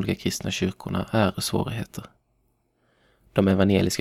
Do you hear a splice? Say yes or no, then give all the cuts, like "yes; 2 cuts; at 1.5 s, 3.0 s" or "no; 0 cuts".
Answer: yes; 1 cut; at 1.3 s